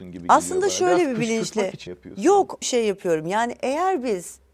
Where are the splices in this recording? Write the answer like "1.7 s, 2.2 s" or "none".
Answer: 1.9 s, 2.6 s